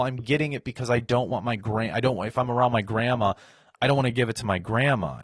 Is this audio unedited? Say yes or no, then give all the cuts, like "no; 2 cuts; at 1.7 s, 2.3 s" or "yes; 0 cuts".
yes; 0 cuts